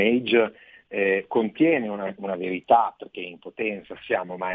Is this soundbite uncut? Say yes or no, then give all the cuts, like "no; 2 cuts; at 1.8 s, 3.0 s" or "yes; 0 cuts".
yes; 0 cuts